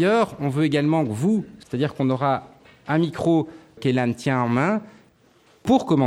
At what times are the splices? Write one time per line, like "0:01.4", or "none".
0:03.8